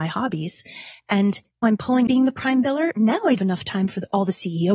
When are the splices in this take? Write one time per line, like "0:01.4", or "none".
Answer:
0:01.6
0:02.1
0:03.4